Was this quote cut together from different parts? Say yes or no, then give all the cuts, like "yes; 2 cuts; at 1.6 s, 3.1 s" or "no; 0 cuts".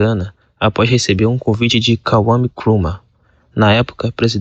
no; 0 cuts